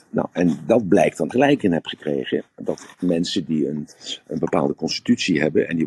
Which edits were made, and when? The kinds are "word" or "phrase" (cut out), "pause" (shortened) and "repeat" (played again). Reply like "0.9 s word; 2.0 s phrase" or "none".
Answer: 1.3 s phrase